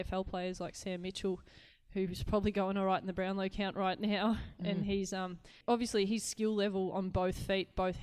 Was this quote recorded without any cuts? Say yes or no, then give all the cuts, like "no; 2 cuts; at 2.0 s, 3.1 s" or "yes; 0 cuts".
yes; 0 cuts